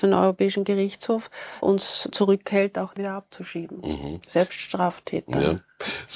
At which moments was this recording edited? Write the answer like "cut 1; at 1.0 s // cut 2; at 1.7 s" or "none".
cut 1; at 1.6 s // cut 2; at 2.1 s // cut 3; at 3.0 s